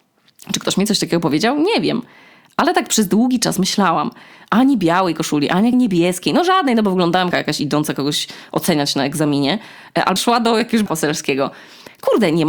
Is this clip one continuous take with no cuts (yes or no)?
no